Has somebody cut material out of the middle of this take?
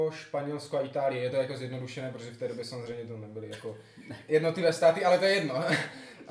no; 0 cuts

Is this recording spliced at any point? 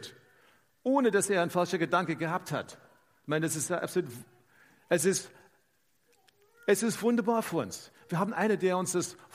no; 0 cuts

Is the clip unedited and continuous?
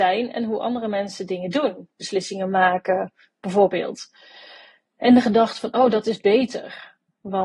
yes; 0 cuts

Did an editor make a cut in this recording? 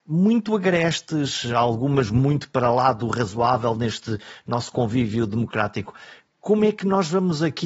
no; 0 cuts

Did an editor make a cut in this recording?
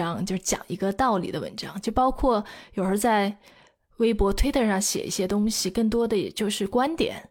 no; 0 cuts

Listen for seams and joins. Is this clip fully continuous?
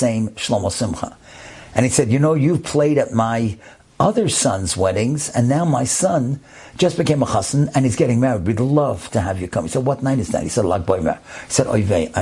yes; 0 cuts

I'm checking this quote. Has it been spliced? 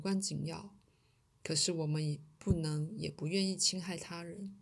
no; 0 cuts

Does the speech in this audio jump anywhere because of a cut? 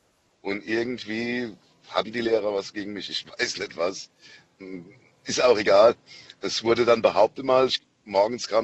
no; 0 cuts

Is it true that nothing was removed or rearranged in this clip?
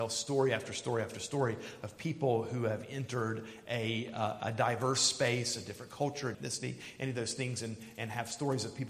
no; 1 cut; at 6.3 s

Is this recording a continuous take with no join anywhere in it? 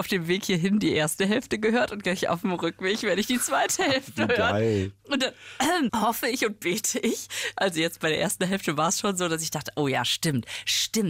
no; 1 cut; at 5.9 s

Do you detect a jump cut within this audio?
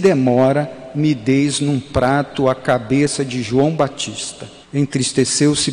yes; 1 cut; at 4.6 s

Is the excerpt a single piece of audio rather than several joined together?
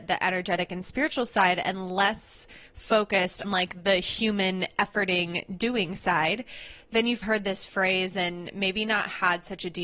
no; 2 cuts; at 3.4 s, 7.2 s

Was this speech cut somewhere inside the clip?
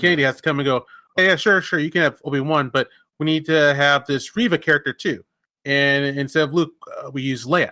yes; 1 cut; at 1.2 s

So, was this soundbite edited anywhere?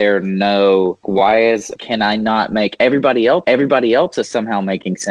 yes; 3 cuts; at 1.0 s, 1.8 s, 3.4 s

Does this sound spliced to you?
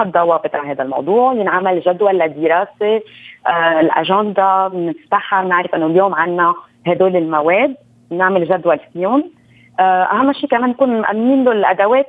no; 0 cuts

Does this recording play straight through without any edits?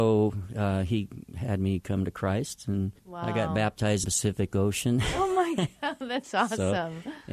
no; 2 cuts; at 3.0 s, 4.0 s

